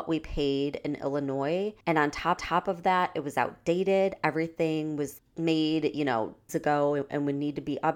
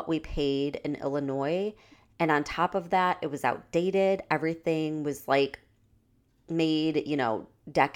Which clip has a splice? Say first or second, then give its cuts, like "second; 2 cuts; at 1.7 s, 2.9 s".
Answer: first; 4 cuts; at 1.8 s, 2.4 s, 5.2 s, 6.5 s